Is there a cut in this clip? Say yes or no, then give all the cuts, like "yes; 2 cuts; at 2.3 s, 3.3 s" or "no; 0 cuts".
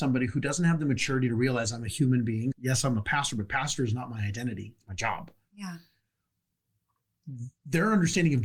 yes; 1 cut; at 2.5 s